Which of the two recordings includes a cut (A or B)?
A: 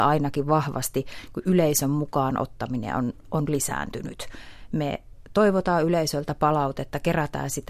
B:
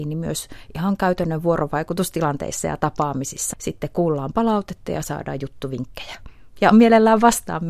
B